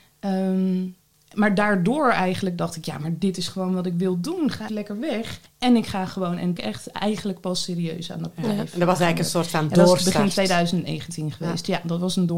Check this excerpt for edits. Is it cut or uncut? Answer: cut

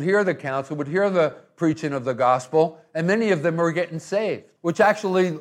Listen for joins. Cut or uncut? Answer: uncut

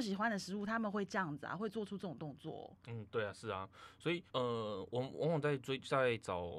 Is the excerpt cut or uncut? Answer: cut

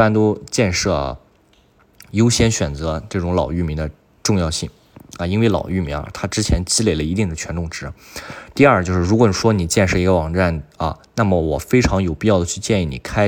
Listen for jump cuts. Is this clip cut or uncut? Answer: uncut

